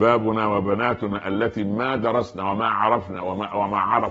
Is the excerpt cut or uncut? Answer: uncut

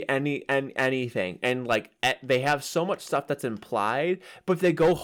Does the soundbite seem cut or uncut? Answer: uncut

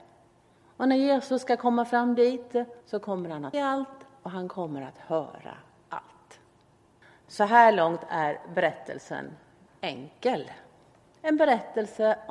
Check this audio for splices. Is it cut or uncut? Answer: cut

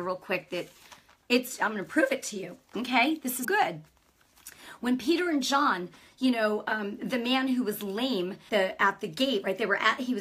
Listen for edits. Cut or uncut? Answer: cut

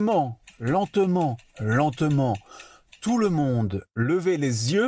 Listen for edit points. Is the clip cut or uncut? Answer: uncut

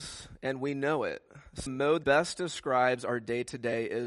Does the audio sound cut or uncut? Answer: cut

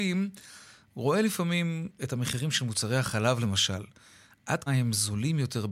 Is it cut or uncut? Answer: cut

